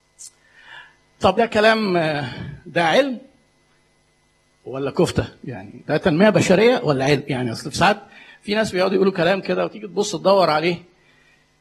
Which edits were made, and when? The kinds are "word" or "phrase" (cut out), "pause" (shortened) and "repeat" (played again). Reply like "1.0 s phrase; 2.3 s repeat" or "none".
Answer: 1.4 s word

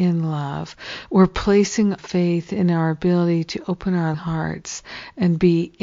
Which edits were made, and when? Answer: 2.0 s word; 4.1 s word

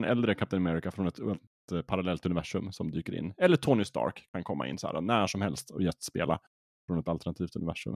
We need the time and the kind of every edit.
none

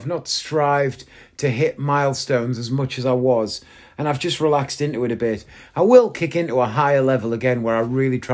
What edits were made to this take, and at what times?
none

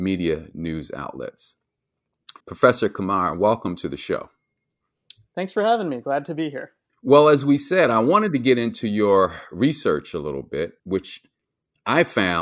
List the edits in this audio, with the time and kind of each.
2.4 s pause; 6.9 s pause; 10.8 s pause

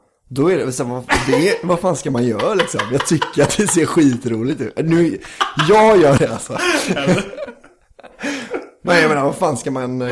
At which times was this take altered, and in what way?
6.2 s word

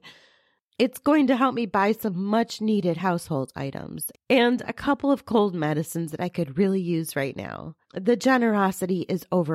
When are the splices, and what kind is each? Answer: 7.8 s pause

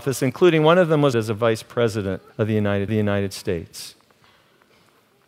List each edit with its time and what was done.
1.1 s word; 2.3 s pause; 2.9 s repeat

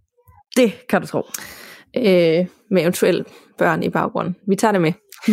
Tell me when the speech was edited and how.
none

